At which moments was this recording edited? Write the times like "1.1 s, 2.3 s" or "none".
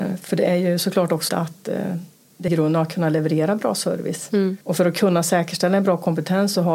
1.3 s, 2.5 s, 4.6 s